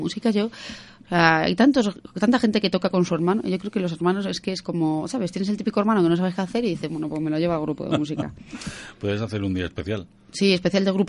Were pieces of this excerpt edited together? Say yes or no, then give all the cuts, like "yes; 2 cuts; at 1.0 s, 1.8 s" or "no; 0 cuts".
no; 0 cuts